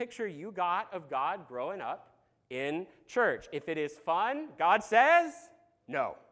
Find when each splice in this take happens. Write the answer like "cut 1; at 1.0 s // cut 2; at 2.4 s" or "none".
none